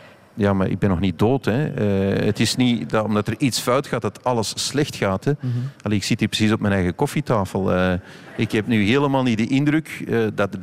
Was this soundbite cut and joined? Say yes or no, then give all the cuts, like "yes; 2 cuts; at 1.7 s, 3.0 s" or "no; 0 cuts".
no; 0 cuts